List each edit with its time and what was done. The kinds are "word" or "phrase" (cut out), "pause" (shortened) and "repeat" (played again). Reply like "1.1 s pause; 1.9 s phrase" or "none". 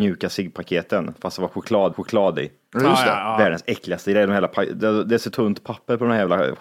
1.9 s repeat; 5.3 s word